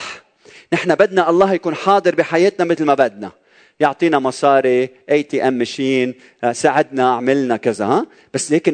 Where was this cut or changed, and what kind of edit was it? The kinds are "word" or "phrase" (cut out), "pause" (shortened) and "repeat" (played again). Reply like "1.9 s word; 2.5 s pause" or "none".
none